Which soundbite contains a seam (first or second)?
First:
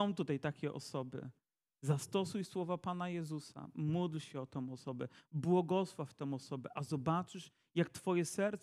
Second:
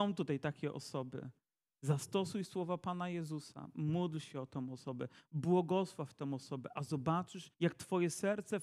second